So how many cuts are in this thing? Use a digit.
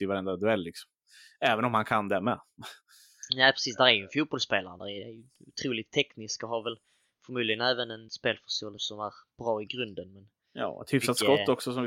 2